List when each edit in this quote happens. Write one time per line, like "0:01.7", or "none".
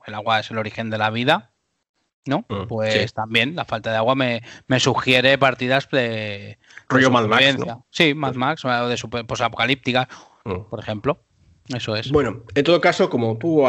none